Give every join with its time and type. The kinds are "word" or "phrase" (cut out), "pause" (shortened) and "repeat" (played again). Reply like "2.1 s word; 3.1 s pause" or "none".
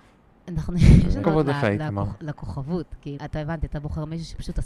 1.2 s word; 3.2 s word